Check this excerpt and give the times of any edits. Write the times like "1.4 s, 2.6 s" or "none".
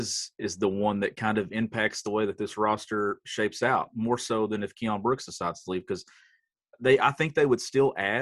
none